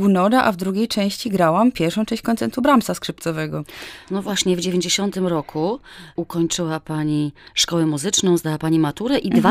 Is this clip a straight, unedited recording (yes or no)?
yes